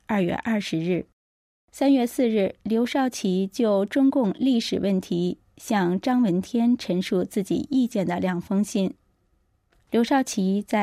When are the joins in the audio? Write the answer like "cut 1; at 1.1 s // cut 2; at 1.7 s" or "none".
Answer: none

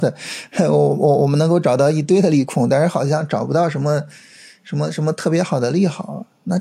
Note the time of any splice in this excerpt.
none

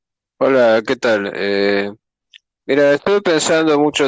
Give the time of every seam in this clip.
none

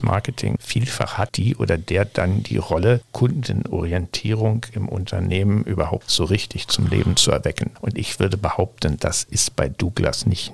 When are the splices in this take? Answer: none

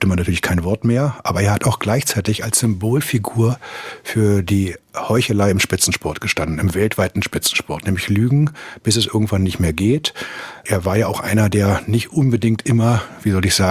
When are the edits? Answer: none

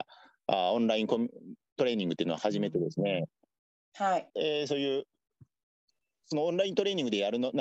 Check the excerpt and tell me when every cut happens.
cut 1; at 4.3 s

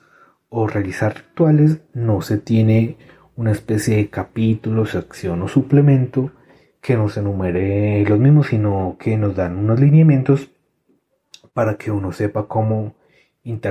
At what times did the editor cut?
none

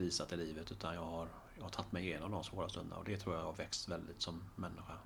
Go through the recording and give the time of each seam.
none

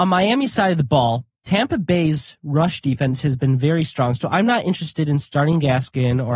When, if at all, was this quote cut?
cut 1; at 1.4 s

